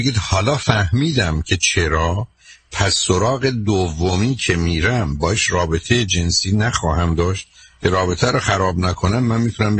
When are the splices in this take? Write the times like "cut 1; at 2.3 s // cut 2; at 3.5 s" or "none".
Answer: none